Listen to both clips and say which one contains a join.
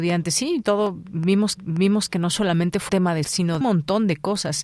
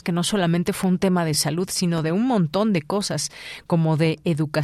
first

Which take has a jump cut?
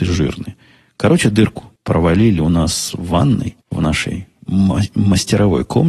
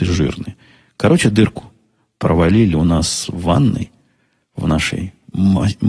first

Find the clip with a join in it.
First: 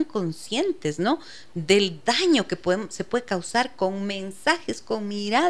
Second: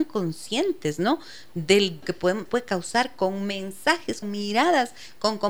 second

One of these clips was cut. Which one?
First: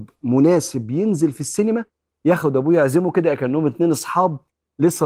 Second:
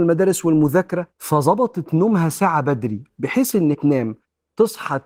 second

